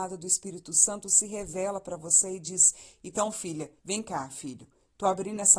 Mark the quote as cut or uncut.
cut